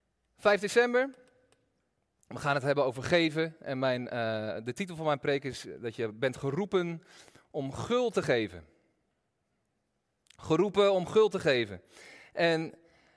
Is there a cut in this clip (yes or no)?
no